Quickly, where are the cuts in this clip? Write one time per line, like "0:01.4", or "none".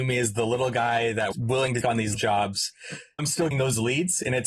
0:01.3
0:01.8
0:02.1
0:03.2
0:03.5